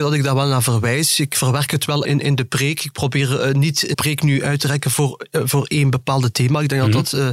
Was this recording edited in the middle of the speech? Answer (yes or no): yes